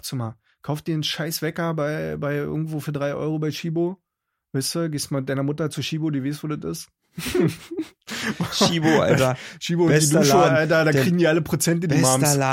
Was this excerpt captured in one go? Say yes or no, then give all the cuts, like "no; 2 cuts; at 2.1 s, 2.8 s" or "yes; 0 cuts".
yes; 0 cuts